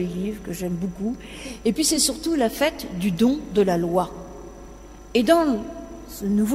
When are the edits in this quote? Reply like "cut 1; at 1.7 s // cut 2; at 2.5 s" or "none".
none

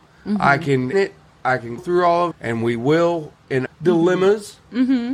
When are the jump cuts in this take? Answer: cut 1; at 0.9 s // cut 2; at 1.8 s // cut 3; at 2.3 s // cut 4; at 3.7 s

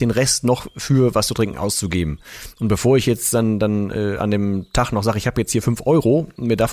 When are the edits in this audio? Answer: none

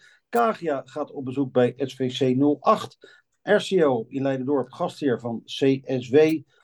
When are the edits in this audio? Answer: none

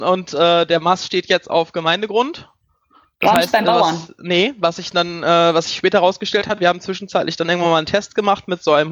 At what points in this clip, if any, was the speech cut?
none

